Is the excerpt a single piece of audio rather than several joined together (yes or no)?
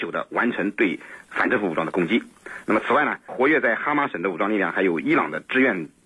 no